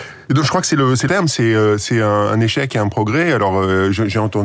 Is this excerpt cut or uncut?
cut